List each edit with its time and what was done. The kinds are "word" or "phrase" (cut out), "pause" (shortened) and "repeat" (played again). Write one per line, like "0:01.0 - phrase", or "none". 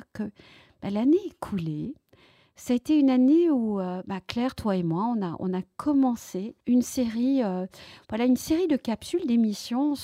0:06.6 - pause